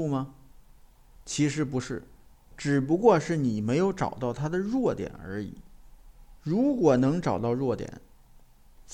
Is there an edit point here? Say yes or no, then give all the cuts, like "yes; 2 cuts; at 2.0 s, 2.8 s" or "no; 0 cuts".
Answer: yes; 1 cut; at 6.4 s